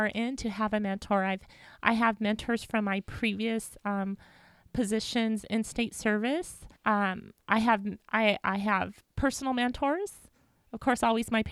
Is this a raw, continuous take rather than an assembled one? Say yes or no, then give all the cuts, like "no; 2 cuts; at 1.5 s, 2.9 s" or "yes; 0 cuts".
no; 1 cut; at 6.8 s